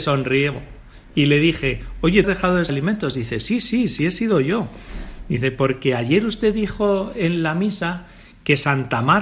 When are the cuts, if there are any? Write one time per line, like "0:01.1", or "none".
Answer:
0:02.2
0:02.7